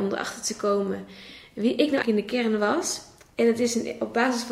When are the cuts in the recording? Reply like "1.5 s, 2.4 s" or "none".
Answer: 2.0 s